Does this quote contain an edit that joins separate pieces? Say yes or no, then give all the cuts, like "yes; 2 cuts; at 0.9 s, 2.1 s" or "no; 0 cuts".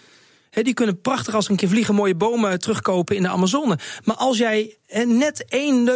no; 0 cuts